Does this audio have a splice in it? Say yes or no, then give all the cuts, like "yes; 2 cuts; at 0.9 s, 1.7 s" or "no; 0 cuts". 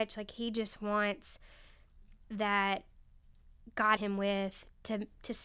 yes; 2 cuts; at 2.2 s, 4.0 s